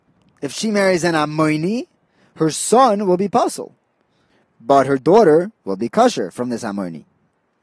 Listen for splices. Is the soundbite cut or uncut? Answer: cut